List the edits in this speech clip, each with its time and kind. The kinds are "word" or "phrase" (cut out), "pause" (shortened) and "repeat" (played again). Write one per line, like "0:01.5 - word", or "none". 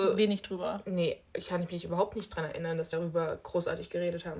0:02.9 - word